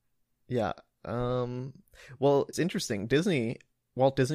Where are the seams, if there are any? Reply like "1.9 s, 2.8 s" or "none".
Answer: 2.5 s